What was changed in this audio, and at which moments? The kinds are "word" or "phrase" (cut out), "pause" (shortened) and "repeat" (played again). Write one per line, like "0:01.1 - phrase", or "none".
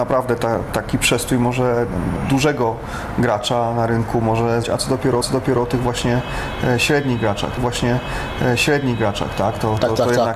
0:02.2 - word
0:04.6 - word
0:05.2 - repeat
0:07.6 - repeat